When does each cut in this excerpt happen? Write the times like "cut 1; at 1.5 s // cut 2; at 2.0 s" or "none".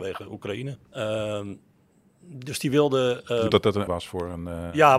cut 1; at 3.5 s // cut 2; at 3.9 s